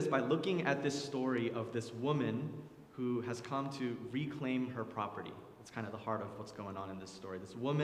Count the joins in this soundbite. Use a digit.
0